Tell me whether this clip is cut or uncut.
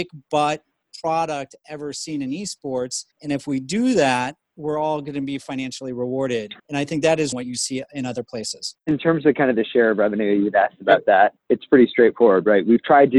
cut